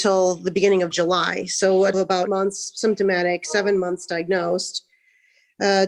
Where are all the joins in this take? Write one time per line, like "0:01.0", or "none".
0:01.9
0:02.3